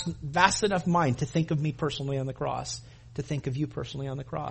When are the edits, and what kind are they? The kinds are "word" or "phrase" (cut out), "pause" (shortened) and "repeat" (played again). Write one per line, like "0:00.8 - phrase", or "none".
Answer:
none